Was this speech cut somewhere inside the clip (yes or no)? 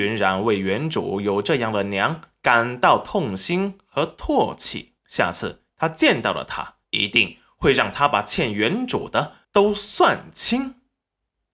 yes